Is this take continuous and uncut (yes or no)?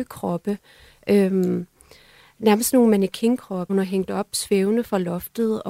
no